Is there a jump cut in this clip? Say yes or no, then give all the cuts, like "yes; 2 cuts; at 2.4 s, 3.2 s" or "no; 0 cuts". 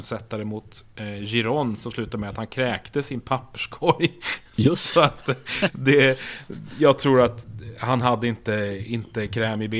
no; 0 cuts